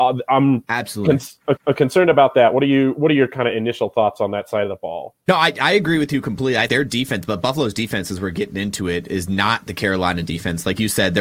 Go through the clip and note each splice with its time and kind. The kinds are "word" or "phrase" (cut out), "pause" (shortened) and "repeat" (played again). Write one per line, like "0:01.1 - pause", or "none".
0:01.6 - repeat
0:05.2 - pause
0:06.7 - word